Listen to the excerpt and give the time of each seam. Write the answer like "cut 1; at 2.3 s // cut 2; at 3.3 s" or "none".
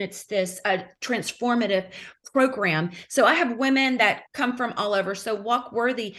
cut 1; at 4.3 s